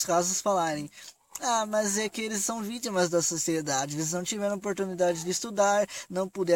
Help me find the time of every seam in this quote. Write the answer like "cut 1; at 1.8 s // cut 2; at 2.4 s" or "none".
none